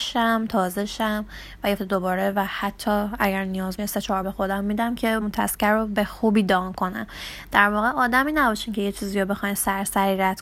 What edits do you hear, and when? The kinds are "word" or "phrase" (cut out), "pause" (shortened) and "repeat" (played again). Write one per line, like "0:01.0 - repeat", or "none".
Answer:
0:01.8 - word
0:03.8 - word
0:04.2 - word
0:05.2 - word